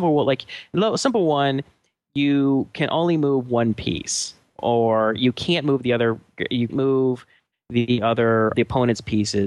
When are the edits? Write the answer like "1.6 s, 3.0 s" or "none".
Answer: 6.7 s, 8.5 s